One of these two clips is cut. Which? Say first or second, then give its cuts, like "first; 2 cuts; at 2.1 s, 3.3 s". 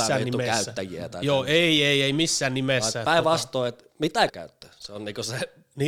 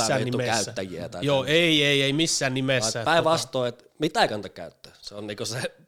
first; 1 cut; at 4.3 s